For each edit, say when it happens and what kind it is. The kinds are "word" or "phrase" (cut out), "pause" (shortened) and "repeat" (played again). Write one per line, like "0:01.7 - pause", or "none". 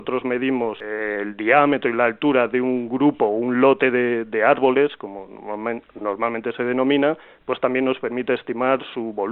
none